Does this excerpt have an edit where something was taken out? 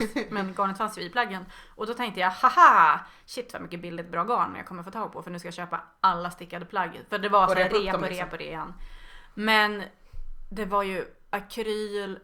no; 0 cuts

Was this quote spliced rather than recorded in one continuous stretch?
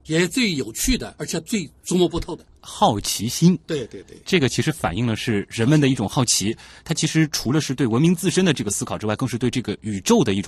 yes; 1 cut; at 1.2 s

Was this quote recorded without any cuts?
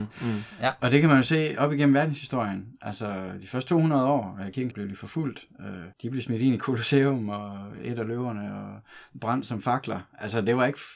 no; 2 cuts; at 4.7 s, 5.9 s

